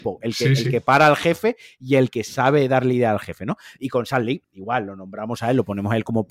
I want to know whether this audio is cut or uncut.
cut